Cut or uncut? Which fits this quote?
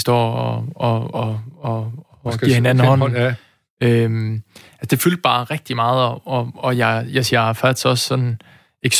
cut